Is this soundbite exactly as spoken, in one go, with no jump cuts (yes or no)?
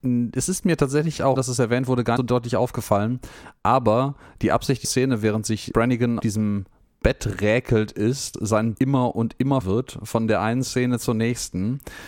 no